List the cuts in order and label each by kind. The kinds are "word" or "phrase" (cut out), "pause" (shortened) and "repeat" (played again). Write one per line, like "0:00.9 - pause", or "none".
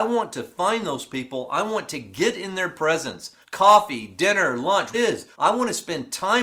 0:03.4 - pause
0:04.9 - phrase
0:05.3 - pause